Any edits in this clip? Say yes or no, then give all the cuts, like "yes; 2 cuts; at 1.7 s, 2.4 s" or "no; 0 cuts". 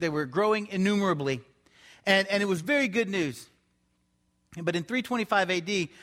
no; 0 cuts